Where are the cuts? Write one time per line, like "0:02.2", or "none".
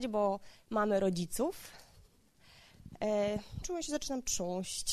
0:03.6